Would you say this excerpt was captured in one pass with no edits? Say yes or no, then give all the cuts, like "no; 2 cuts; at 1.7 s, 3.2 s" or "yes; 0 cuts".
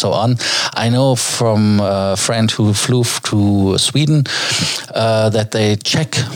yes; 0 cuts